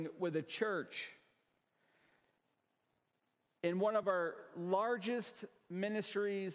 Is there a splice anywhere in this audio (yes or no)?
no